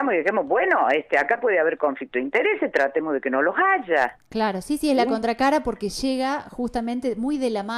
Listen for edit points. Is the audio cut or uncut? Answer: uncut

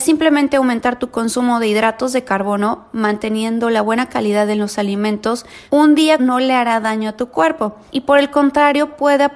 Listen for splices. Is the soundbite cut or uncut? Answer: cut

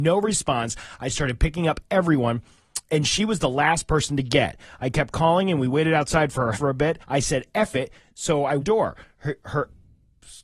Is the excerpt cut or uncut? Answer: cut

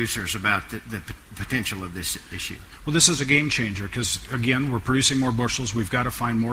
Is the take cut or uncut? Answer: uncut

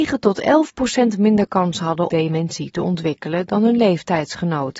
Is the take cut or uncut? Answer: cut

